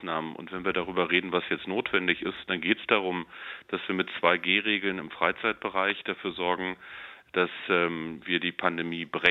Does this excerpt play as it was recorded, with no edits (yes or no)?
yes